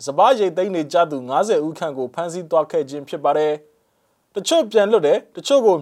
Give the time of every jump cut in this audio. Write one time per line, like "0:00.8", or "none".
none